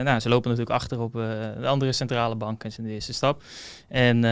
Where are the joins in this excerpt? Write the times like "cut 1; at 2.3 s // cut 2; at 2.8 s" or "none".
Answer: cut 1; at 2.8 s